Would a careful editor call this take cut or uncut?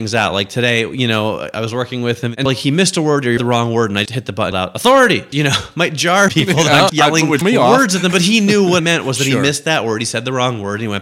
cut